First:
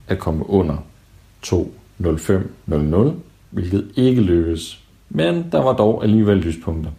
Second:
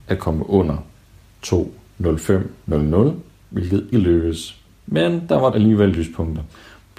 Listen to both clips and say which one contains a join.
second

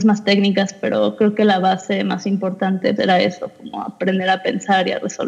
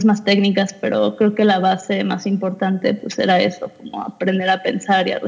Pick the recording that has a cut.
first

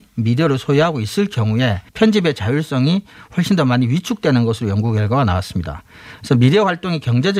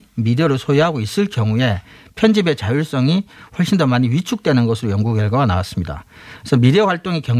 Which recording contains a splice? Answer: first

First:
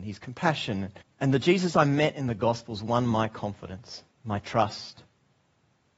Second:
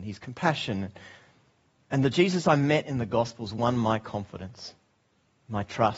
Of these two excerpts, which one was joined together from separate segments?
first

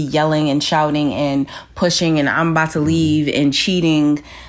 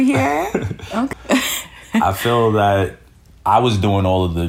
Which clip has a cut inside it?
second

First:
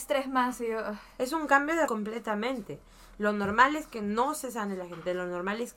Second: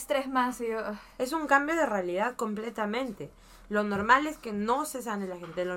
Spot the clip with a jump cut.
first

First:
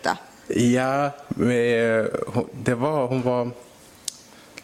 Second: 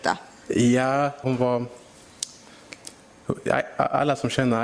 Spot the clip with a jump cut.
second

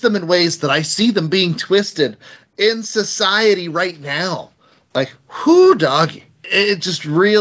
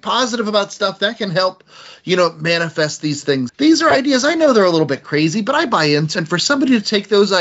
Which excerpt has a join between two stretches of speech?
second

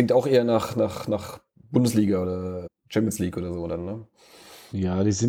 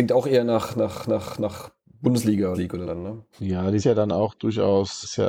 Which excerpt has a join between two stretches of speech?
second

